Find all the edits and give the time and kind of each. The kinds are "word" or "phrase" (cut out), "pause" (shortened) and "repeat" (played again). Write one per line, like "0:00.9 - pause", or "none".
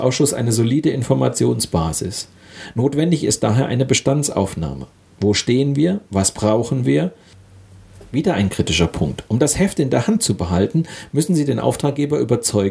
none